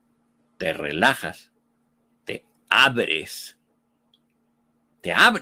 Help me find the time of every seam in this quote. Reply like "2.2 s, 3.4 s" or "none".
none